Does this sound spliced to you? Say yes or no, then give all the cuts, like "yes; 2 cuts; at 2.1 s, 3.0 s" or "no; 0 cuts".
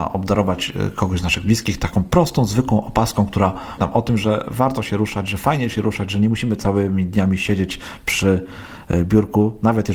yes; 1 cut; at 3.8 s